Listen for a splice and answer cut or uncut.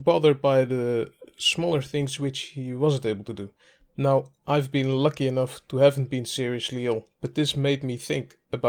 uncut